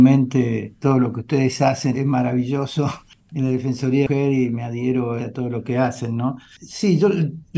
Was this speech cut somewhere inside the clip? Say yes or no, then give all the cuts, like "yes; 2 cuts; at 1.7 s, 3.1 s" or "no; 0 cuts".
yes; 2 cuts; at 1.9 s, 5.2 s